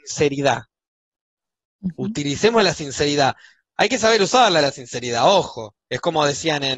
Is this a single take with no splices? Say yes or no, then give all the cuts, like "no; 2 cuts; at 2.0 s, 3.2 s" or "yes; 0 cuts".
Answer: yes; 0 cuts